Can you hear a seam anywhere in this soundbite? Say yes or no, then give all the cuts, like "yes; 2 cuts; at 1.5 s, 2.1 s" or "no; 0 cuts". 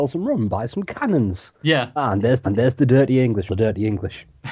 yes; 2 cuts; at 2.4 s, 3.5 s